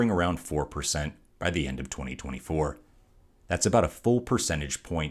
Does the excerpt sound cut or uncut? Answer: uncut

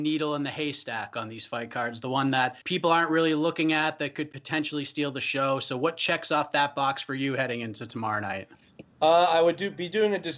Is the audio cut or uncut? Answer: cut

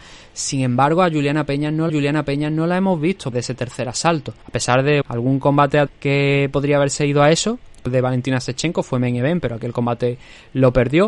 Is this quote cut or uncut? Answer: cut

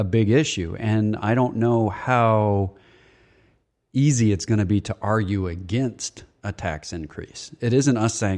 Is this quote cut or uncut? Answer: uncut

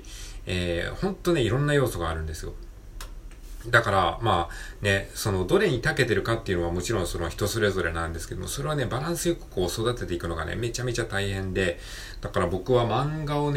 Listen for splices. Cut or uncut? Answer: uncut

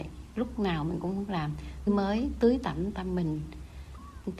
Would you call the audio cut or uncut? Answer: cut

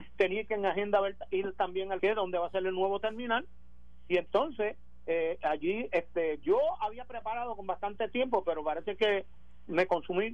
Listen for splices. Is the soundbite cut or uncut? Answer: cut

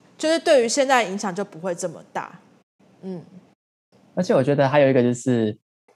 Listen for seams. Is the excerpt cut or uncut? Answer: uncut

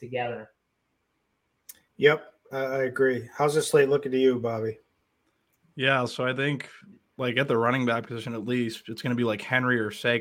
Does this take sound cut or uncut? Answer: uncut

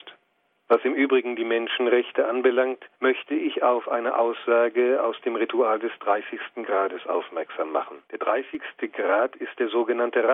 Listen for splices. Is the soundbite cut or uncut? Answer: cut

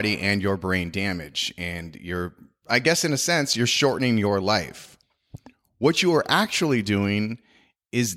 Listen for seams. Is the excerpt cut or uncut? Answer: uncut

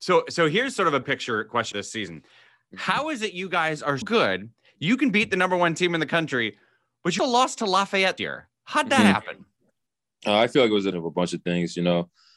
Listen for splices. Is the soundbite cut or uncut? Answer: cut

